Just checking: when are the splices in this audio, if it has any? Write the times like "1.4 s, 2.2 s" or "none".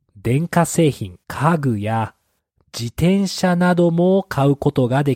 1.2 s